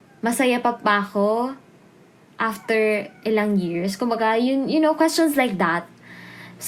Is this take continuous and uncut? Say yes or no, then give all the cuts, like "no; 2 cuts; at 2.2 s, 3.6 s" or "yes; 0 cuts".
yes; 0 cuts